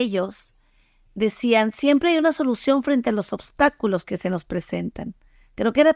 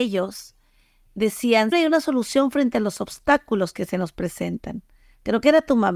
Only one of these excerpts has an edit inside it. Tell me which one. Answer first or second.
second